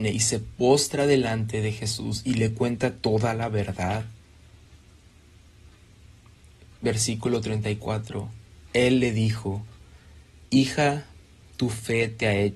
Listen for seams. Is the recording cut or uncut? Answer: uncut